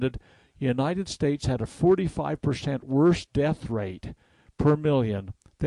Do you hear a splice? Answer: no; 0 cuts

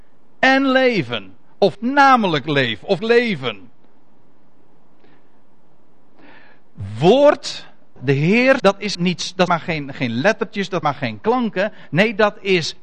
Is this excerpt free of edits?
no; 7 cuts; at 1.7 s, 3.0 s, 8.0 s, 8.6 s, 8.9 s, 9.5 s, 10.8 s

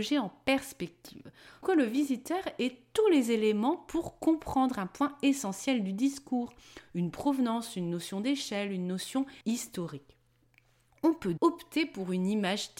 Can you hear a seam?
yes; 3 cuts; at 1.6 s, 9.4 s, 11.4 s

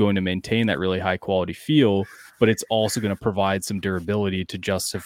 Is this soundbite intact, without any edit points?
yes; 0 cuts

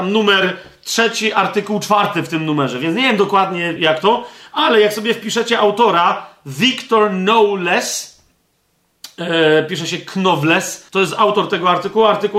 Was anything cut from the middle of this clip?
yes; 2 cuts; at 3.8 s, 10.9 s

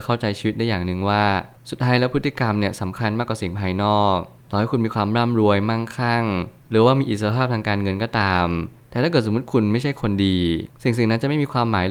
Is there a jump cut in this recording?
no; 0 cuts

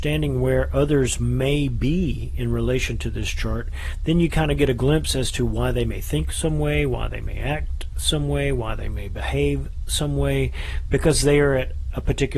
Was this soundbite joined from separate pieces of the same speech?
no; 0 cuts

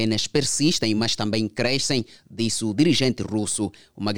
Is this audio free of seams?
yes; 0 cuts

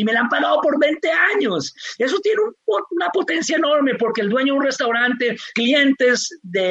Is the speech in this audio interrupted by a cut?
yes; 1 cut; at 5.5 s

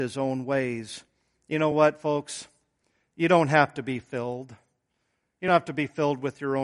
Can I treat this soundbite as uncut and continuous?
yes; 0 cuts

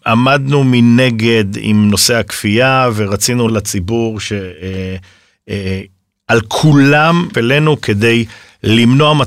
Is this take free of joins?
no; 2 cuts; at 3.5 s, 7.3 s

